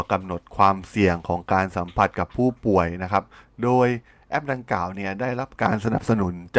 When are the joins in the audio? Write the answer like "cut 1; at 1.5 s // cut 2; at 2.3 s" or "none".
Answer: none